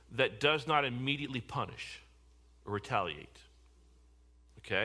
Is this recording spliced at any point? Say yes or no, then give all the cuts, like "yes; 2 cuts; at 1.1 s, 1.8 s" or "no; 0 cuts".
no; 0 cuts